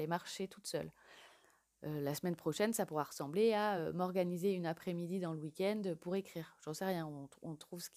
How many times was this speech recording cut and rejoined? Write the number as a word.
zero